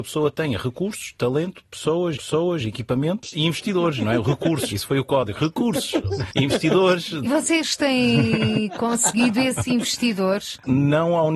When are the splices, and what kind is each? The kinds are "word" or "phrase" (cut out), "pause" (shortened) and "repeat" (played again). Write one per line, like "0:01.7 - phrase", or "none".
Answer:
0:02.1 - repeat
0:04.7 - word
0:05.4 - word